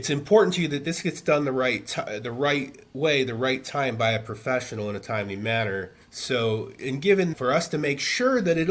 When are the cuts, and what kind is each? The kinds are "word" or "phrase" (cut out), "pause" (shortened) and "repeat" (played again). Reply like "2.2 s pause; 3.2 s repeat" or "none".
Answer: 6.0 s pause; 7.3 s word